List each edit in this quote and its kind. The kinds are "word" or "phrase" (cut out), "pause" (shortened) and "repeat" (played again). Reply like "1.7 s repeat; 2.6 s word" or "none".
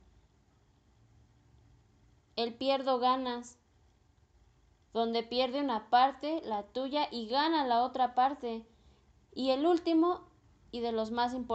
none